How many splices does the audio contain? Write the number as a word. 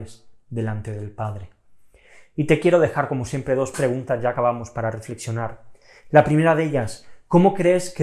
zero